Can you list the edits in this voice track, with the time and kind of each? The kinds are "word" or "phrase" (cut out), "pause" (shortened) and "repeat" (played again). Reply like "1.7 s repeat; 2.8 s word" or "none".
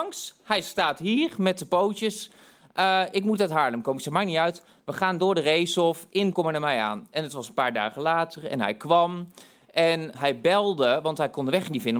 6.3 s word; 10.1 s word